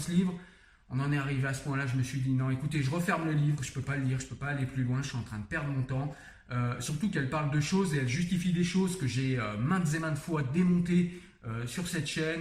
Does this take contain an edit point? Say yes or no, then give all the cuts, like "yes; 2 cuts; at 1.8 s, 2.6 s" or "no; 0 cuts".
no; 0 cuts